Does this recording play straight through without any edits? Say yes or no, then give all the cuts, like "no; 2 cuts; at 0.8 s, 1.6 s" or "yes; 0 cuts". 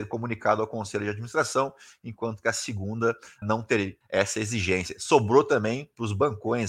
no; 2 cuts; at 3.4 s, 4.0 s